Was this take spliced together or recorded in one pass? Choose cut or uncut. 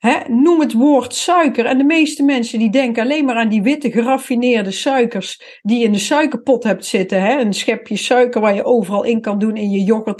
uncut